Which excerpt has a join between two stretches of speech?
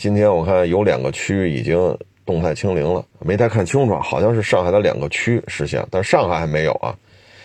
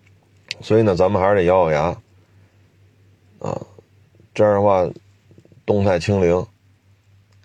first; 1 cut; at 3.1 s

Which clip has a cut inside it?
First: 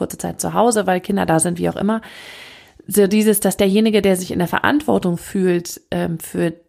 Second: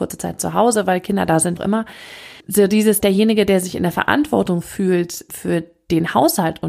second; 4 cuts; at 1.6 s, 2.4 s, 3.0 s, 5.3 s

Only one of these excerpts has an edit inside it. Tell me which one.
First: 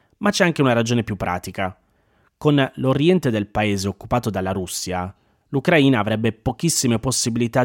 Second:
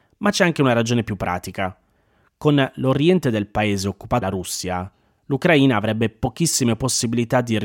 second; 1 cut; at 4.2 s

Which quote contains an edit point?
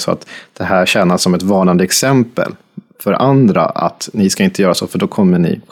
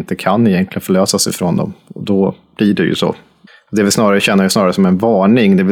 second; 1 cut; at 3.5 s

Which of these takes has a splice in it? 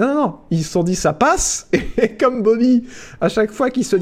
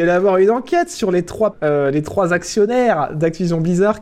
second; 1 cut; at 1.5 s

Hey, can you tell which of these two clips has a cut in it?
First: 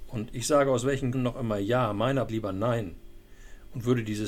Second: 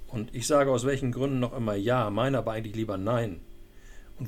first; 2 cuts; at 1.1 s, 2.3 s

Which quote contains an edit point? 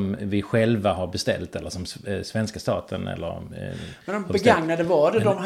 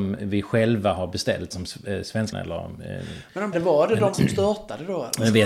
second; 4 cuts; at 1.5 s, 2.3 s, 3.5 s, 4.1 s

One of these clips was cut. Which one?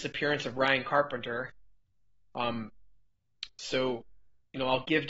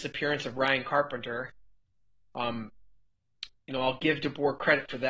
second; 1 cut; at 3.5 s

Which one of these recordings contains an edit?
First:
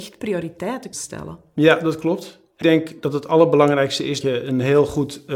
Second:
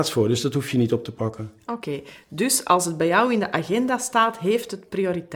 first; 3 cuts; at 0.9 s, 2.6 s, 4.2 s

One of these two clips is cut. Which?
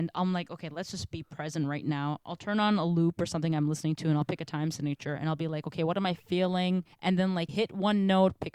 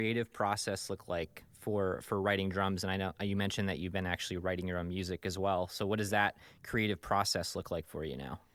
first; 2 cuts; at 6.9 s, 7.5 s

